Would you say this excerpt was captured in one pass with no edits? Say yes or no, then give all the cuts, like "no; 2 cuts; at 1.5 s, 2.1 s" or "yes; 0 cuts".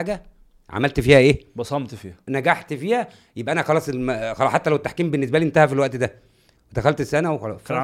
yes; 0 cuts